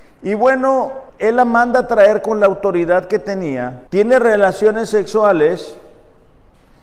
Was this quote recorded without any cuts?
no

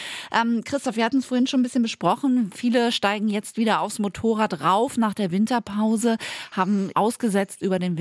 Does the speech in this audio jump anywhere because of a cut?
yes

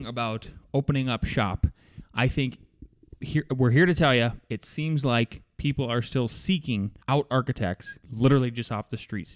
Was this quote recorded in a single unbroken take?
no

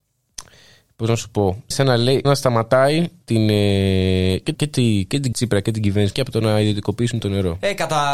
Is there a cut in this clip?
yes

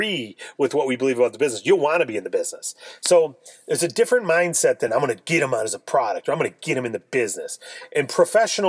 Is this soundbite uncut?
yes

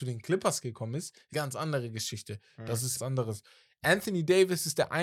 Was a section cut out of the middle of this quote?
yes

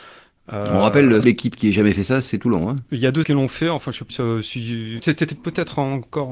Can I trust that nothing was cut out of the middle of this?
no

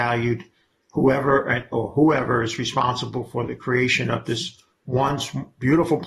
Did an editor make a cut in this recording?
no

